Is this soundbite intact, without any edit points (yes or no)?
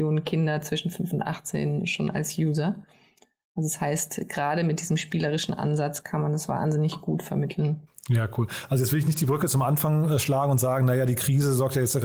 yes